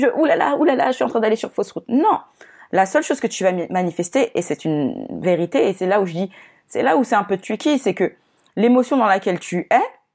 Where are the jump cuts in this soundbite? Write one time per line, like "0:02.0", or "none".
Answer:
none